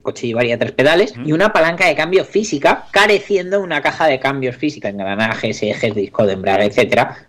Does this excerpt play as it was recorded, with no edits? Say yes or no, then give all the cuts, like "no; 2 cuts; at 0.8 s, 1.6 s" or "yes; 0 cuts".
no; 3 cuts; at 1.1 s, 2.9 s, 4.8 s